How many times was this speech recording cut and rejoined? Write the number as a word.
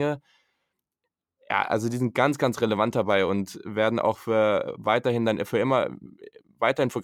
zero